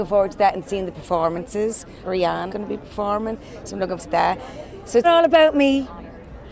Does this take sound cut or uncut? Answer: cut